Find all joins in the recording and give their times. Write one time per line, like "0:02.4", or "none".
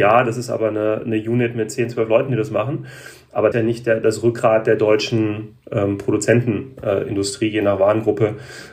0:03.5